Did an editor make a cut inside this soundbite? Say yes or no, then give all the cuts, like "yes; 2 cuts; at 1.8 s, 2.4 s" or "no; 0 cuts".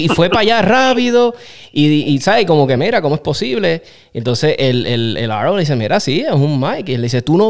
no; 0 cuts